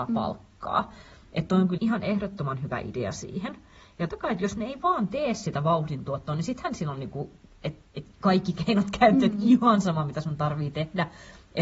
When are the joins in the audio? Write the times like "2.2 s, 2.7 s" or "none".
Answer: 1.8 s, 4.1 s